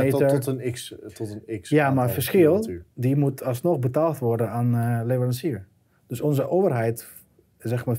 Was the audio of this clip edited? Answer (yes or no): no